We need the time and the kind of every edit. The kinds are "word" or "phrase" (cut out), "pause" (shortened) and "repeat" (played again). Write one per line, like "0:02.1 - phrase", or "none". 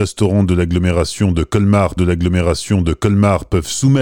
0:02.0 - repeat